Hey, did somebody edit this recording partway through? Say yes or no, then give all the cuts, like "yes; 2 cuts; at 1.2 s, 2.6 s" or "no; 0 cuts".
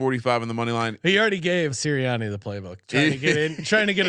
yes; 1 cut; at 1.7 s